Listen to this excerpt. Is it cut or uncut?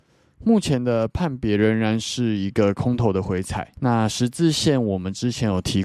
cut